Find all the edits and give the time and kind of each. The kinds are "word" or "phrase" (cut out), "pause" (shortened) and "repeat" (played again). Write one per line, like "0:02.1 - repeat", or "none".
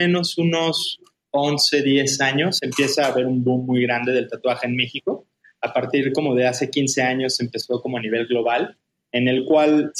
none